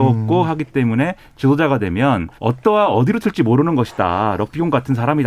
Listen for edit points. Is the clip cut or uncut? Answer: cut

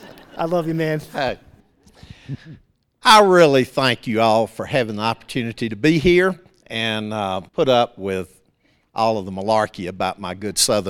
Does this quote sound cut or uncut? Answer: cut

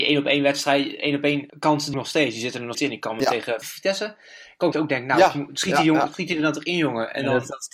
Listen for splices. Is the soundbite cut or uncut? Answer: cut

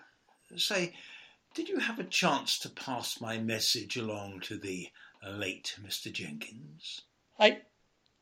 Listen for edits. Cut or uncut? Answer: uncut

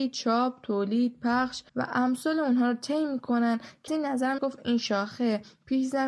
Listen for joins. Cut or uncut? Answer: cut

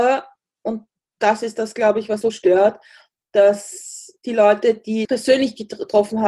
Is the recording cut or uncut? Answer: cut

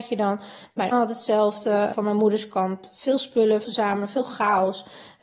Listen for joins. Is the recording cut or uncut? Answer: cut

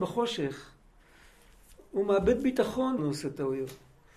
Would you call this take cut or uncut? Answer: cut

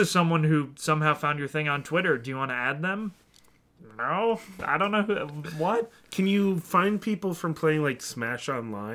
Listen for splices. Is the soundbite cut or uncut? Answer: uncut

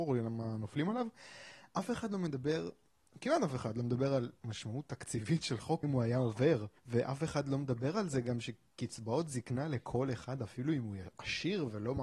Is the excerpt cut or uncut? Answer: cut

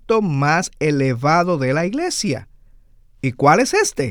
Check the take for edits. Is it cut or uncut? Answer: uncut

